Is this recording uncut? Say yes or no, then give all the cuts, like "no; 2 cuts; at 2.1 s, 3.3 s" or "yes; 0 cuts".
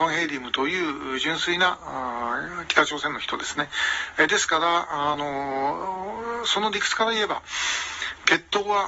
yes; 0 cuts